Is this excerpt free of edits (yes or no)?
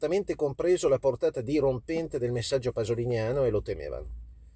yes